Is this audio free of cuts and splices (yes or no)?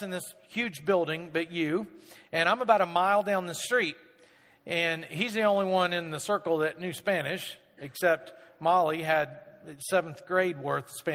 yes